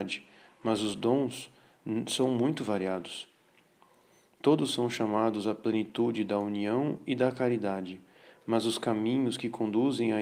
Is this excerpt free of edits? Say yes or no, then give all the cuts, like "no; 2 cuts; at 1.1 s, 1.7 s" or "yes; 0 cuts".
yes; 0 cuts